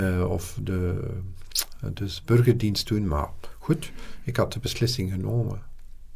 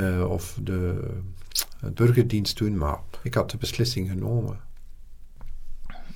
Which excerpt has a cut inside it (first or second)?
second